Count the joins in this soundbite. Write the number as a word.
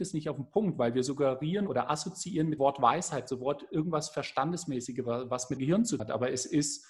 four